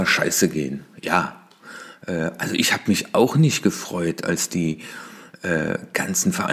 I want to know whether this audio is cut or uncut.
uncut